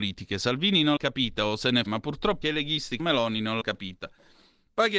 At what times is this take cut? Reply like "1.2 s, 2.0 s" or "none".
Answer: 1.0 s, 1.9 s, 2.4 s, 3.0 s, 3.6 s